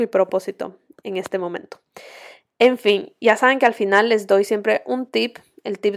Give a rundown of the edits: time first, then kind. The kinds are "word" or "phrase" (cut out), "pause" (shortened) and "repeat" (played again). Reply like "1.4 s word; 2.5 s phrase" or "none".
none